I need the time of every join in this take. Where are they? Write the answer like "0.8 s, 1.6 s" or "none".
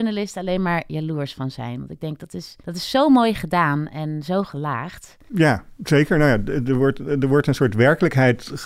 2.6 s

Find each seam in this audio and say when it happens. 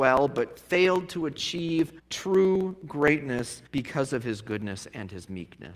2.0 s, 3.7 s

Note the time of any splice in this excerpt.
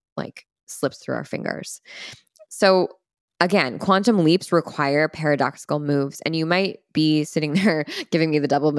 none

